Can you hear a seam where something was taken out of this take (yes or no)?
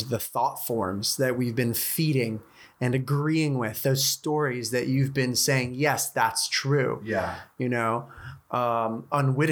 no